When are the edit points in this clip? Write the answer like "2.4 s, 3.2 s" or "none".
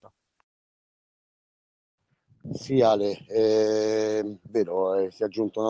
4.5 s